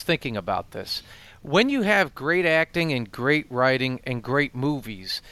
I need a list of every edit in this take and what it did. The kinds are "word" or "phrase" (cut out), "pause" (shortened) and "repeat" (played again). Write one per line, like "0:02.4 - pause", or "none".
none